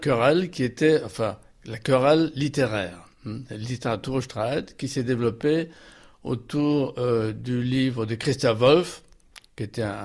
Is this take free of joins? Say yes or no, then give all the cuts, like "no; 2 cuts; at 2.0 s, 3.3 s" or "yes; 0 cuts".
yes; 0 cuts